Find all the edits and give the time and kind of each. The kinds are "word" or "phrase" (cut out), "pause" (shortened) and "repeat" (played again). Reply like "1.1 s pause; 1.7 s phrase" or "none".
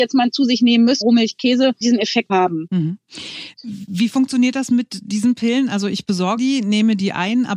1.0 s word; 1.8 s word; 2.3 s word; 6.4 s word